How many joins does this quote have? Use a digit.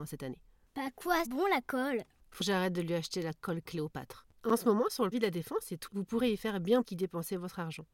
5